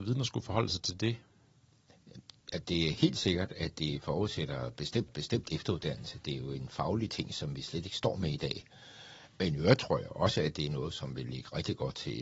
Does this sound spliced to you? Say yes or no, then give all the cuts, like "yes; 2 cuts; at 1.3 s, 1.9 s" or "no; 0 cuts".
yes; 2 cuts; at 2.6 s, 5.1 s